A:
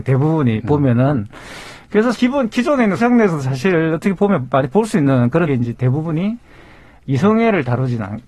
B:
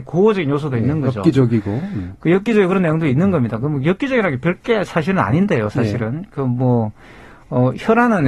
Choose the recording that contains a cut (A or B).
A